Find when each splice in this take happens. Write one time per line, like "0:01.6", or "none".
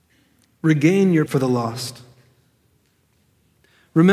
0:01.3